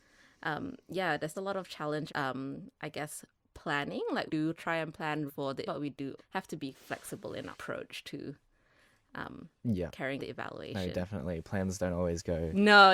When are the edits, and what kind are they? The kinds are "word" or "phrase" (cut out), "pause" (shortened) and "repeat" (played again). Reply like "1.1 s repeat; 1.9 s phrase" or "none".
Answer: 1.3 s word; 2.1 s word; 4.3 s word; 5.3 s word; 5.7 s word; 6.2 s word; 6.7 s word; 7.5 s word; 10.2 s word